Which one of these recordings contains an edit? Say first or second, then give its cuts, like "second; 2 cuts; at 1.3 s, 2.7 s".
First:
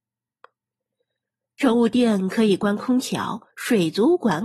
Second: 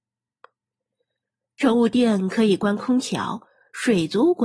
first; 1 cut; at 3.5 s